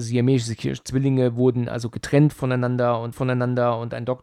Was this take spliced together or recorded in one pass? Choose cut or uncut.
cut